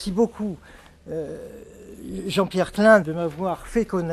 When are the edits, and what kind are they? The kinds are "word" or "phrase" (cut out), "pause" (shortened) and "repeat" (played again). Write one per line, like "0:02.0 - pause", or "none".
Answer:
0:03.0 - word